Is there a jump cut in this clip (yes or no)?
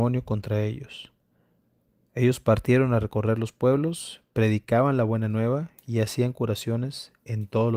no